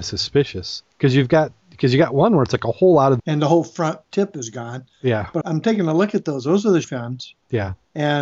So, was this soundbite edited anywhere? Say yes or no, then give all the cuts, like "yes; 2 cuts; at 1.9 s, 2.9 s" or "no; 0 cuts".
yes; 3 cuts; at 3.2 s, 5.4 s, 6.8 s